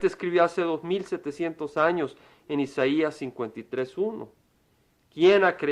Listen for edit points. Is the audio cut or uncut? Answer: uncut